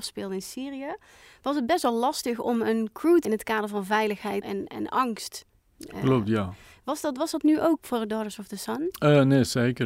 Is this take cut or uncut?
cut